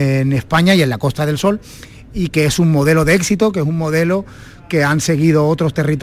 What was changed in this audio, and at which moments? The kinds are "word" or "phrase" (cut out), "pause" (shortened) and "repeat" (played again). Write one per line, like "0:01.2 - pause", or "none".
none